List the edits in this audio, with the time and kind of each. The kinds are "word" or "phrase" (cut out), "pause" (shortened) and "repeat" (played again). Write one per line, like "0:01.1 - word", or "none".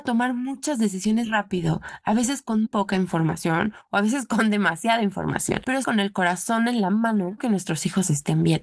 0:01.2 - word
0:02.6 - word
0:05.8 - word
0:07.4 - word